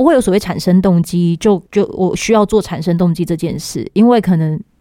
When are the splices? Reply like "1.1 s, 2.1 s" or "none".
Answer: 1.7 s